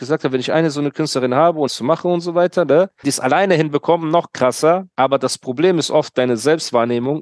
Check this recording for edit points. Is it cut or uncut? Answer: cut